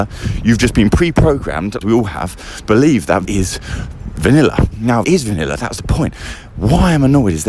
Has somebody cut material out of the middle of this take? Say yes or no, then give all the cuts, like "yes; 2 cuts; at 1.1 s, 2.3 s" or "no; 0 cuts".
yes; 4 cuts; at 1.8 s, 2.6 s, 3.2 s, 5.0 s